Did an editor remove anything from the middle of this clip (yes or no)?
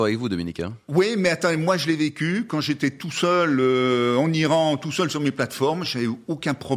no